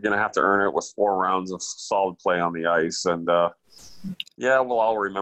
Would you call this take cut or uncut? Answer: uncut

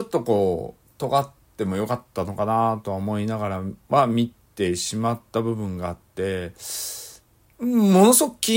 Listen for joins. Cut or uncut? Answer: uncut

